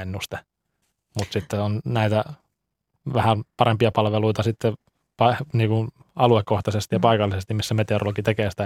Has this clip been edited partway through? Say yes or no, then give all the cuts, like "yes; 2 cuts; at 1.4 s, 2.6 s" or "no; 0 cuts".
no; 0 cuts